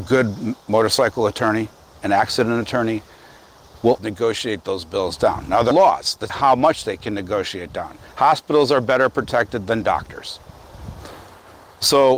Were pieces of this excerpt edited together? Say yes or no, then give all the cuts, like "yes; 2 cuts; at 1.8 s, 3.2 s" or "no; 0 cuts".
yes; 3 cuts; at 4.0 s, 5.7 s, 6.3 s